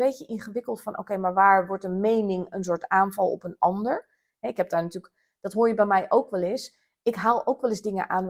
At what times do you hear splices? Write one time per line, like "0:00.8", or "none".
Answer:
none